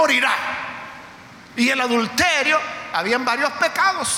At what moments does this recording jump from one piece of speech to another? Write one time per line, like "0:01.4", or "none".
0:01.4